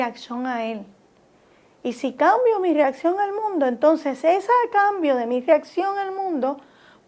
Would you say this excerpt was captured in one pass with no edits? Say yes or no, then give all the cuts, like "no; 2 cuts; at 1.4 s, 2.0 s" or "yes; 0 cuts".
yes; 0 cuts